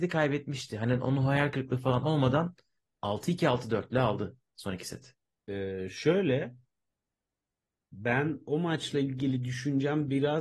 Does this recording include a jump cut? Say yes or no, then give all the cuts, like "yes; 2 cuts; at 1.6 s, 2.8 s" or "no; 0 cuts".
no; 0 cuts